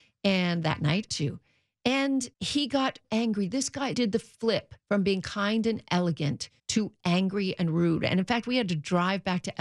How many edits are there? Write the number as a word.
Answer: six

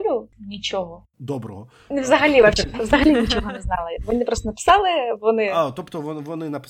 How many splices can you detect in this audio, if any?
zero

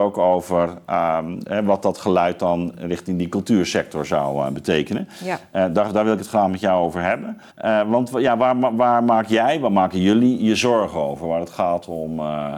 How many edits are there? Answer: one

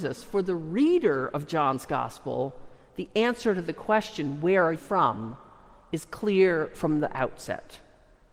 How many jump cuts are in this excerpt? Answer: one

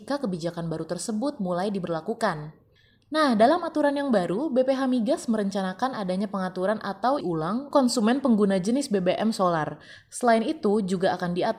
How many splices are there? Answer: three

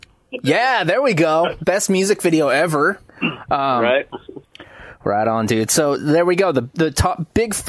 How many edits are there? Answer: one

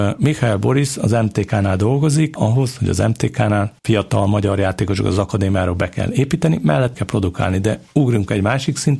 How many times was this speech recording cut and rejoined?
three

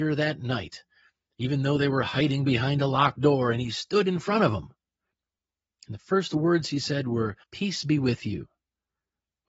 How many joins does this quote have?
one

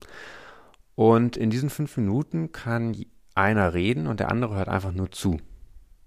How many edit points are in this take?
zero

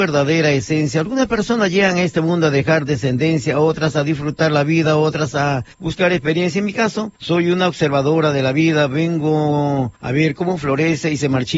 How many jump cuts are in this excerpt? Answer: three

